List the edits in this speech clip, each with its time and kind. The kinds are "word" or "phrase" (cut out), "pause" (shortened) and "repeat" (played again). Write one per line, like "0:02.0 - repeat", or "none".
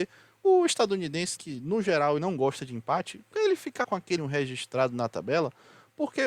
0:01.4 - word
0:02.2 - word
0:03.8 - word
0:04.2 - word

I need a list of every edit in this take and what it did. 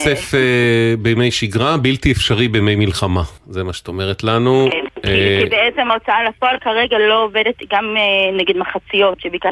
0:03.4 - pause

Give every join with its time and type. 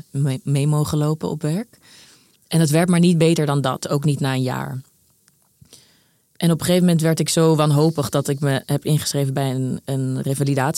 none

